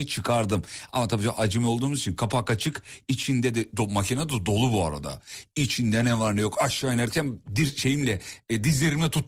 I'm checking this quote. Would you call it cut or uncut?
uncut